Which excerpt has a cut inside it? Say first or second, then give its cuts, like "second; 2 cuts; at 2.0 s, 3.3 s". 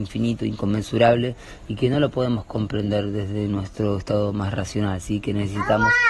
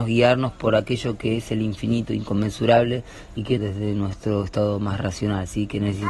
second; 1 cut; at 3.6 s